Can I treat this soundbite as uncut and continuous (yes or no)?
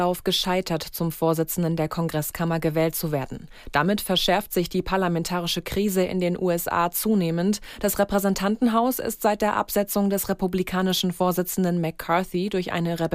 yes